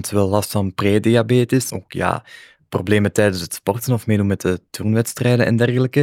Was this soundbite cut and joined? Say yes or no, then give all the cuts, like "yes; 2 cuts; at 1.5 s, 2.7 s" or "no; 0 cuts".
yes; 1 cut; at 1.7 s